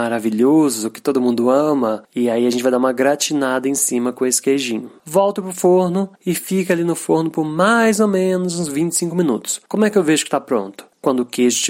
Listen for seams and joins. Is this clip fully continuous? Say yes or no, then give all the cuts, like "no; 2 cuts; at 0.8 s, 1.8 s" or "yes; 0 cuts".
no; 1 cut; at 6.1 s